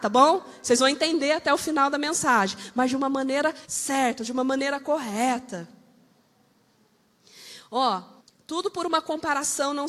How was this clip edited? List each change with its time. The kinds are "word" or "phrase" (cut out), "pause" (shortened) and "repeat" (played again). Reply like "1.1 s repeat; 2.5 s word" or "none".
3.6 s pause; 8.2 s pause